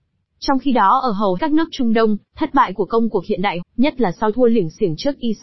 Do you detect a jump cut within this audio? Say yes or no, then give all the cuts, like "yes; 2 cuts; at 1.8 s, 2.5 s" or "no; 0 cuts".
yes; 3 cuts; at 1.4 s, 3.6 s, 4.3 s